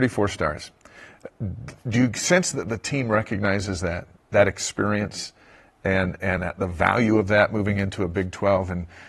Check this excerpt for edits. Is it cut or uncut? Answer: uncut